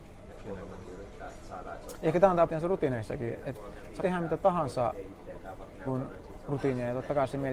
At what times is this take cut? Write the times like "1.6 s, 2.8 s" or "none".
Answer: 2.5 s, 3.4 s, 4.0 s, 5.8 s